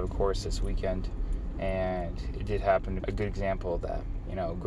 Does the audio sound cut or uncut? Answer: cut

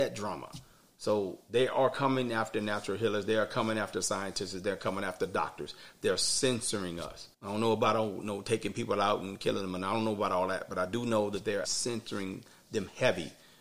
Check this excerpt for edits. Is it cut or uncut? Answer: cut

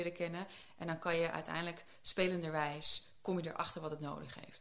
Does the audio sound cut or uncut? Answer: uncut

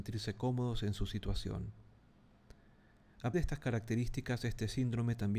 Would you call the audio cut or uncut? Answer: cut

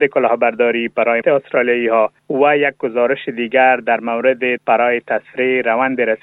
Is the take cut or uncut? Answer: cut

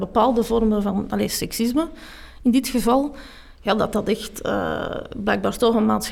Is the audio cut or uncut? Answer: uncut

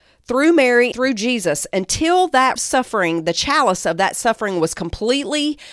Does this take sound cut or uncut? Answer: cut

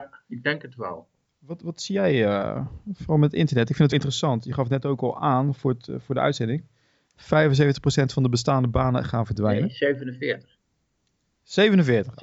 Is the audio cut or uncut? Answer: cut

